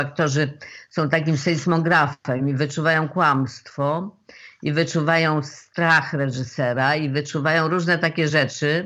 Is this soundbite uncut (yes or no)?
yes